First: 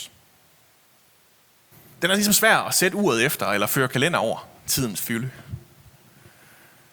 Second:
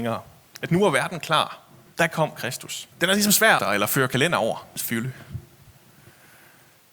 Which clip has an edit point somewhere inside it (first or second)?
second